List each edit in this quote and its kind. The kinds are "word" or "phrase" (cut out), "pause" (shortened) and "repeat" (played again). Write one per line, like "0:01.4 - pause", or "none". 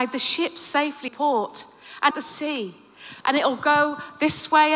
0:01.1 - word
0:02.1 - phrase
0:03.2 - pause